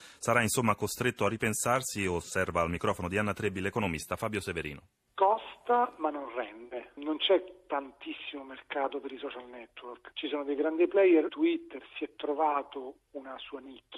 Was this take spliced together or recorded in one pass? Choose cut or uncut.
uncut